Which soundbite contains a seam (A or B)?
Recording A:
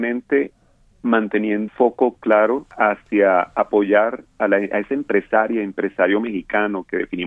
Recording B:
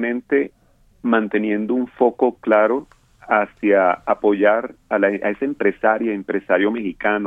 A